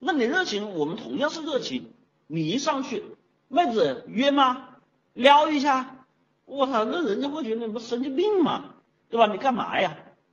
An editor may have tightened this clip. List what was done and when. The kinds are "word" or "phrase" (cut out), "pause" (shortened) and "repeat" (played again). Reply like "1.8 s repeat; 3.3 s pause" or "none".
none